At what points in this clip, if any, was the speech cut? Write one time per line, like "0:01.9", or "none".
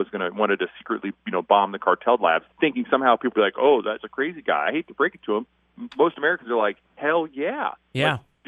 0:02.5
0:03.3
0:04.0
0:06.8